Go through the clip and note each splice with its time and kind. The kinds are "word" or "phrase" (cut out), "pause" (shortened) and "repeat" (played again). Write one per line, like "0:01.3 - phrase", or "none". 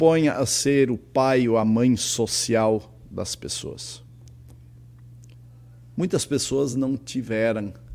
none